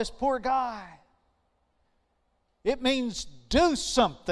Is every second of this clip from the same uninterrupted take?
yes; 0 cuts

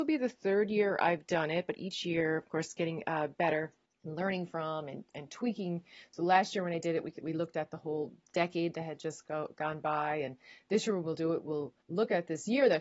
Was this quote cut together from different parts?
yes; 2 cuts; at 3.9 s, 11.8 s

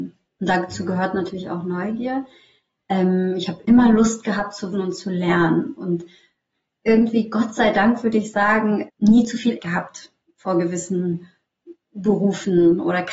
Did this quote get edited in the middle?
yes; 4 cuts; at 3.6 s, 4.7 s, 8.9 s, 9.6 s

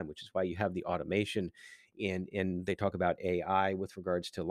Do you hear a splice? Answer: no; 0 cuts

